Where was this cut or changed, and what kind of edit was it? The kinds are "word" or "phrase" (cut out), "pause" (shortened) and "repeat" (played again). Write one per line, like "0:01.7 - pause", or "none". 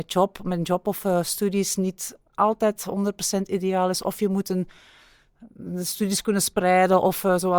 0:02.3 - pause